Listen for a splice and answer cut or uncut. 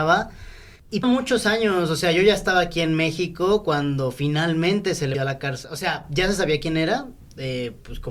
cut